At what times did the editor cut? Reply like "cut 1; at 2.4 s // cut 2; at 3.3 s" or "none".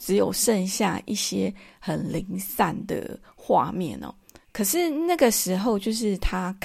cut 1; at 4.4 s